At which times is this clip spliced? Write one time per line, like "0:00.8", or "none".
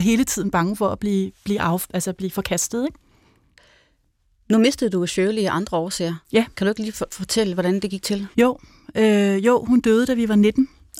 0:08.3